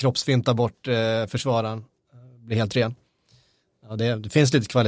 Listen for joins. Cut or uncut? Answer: uncut